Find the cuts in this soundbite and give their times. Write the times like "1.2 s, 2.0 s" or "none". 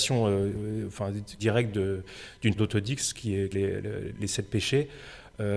1.4 s, 2.6 s, 3.5 s, 4.2 s

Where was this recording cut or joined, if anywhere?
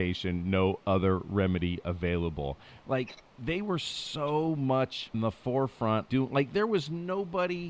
3.2 s, 5.1 s, 6.1 s

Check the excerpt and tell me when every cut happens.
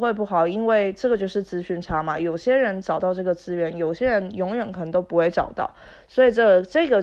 none

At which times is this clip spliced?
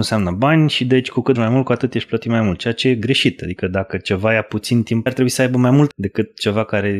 1.4 s, 5.1 s, 5.9 s

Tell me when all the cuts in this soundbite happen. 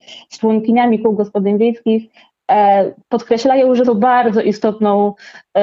3.8 s

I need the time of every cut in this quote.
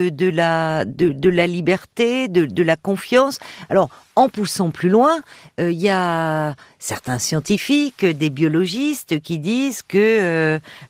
none

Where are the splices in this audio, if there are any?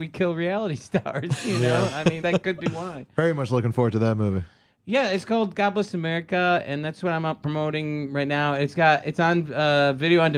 2.2 s

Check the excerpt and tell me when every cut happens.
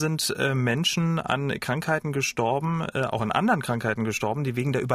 none

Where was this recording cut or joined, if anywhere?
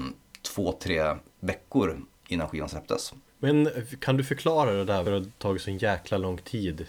1.3 s, 3.3 s, 5.0 s

